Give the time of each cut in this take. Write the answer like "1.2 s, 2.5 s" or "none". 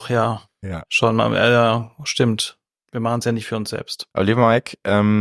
2.7 s, 4.1 s